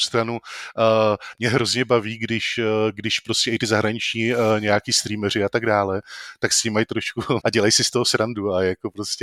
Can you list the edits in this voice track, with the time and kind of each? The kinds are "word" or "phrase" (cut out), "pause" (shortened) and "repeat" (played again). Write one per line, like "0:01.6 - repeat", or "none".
0:07.4 - phrase